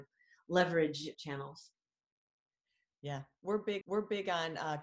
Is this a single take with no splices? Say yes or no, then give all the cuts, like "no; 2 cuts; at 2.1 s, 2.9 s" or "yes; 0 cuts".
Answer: no; 2 cuts; at 1.1 s, 3.8 s